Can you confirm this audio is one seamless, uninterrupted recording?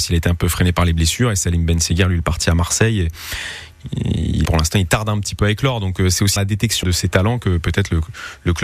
no; 3 cuts; at 4.5 s, 6.4 s, 6.8 s

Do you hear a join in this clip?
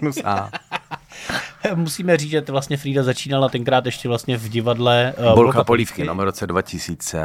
no; 0 cuts

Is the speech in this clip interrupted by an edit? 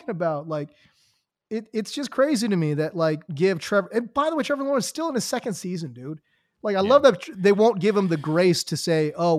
yes; 1 cut; at 3.3 s

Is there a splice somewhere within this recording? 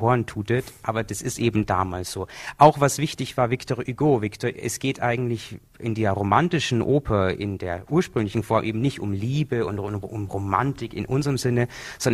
no; 0 cuts

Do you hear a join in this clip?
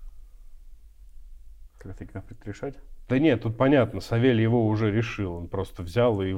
no; 0 cuts

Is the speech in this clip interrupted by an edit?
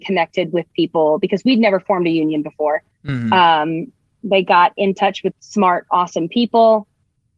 yes; 1 cut; at 5.3 s

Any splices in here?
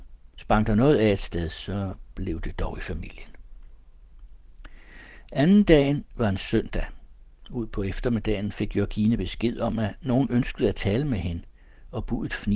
no; 0 cuts

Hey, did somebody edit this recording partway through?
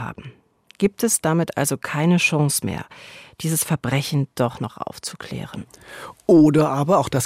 no; 0 cuts

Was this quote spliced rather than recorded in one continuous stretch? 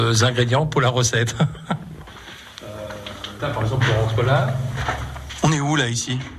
yes; 1 cut; at 3.4 s

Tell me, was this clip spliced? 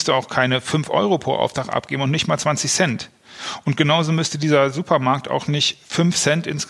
no; 0 cuts

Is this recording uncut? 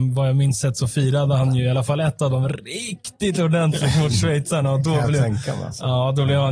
yes; 0 cuts

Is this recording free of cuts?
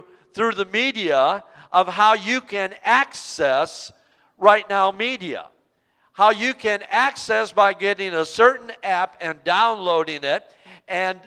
yes; 0 cuts

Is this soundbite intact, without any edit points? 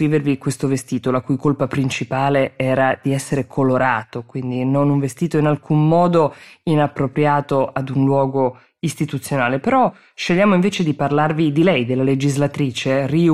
yes; 0 cuts

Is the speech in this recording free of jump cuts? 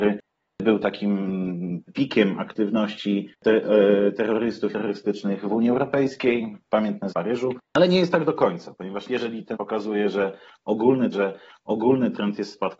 no; 8 cuts; at 1.9 s, 3.4 s, 4.7 s, 7.1 s, 7.7 s, 9.1 s, 9.5 s, 11.1 s

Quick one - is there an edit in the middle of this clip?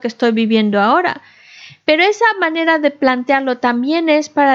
no; 0 cuts

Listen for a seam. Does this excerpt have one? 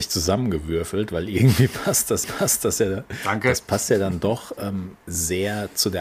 yes; 2 cuts; at 2.2 s, 5.0 s

